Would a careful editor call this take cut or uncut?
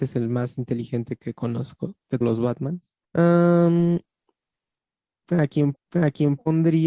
cut